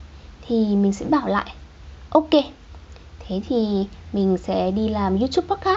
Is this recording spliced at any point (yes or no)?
no